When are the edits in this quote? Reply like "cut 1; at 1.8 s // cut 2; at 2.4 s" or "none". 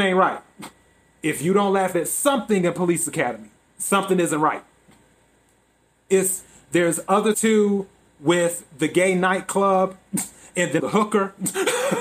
cut 1; at 7.3 s // cut 2; at 10.8 s